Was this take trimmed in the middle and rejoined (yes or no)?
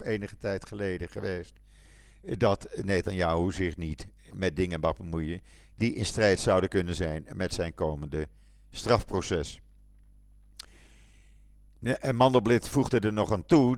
yes